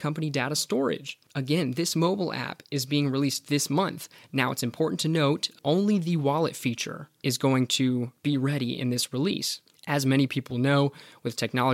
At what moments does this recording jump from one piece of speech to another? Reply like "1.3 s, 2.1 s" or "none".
none

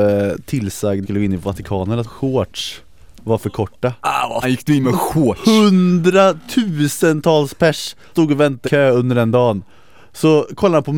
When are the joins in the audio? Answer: 1.0 s, 2.0 s, 4.4 s, 4.8 s, 8.1 s, 8.6 s

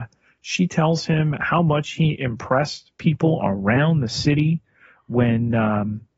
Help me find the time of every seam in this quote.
none

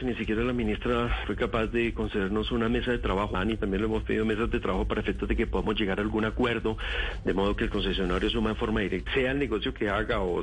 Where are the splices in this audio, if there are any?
1.2 s, 3.3 s, 9.1 s

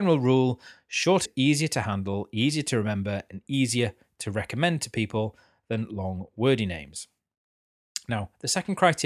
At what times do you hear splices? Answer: 1.3 s

